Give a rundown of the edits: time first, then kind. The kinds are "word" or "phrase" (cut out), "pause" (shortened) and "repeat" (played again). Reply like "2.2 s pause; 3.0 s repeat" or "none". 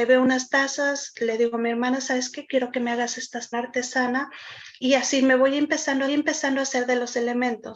3.5 s phrase; 4.8 s word; 6.1 s repeat